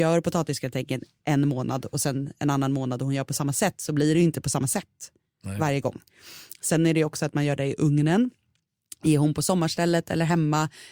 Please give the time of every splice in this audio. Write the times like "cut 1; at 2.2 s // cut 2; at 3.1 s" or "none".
none